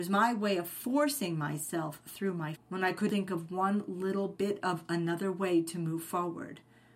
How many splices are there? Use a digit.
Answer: 2